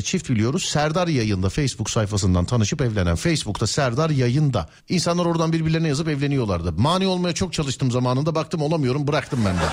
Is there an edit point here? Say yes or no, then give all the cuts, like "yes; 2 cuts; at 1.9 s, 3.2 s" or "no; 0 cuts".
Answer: yes; 1 cut; at 4.8 s